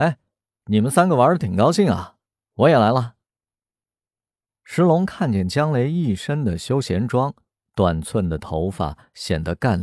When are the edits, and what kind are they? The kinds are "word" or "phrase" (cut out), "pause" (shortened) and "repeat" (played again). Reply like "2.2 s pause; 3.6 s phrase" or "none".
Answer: none